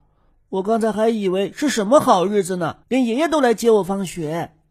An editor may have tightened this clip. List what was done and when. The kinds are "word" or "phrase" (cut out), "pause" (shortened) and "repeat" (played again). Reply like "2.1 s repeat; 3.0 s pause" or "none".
2.8 s pause